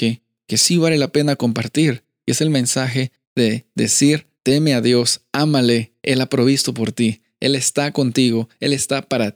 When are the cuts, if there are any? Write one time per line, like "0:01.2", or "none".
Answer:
0:03.2
0:04.3
0:06.0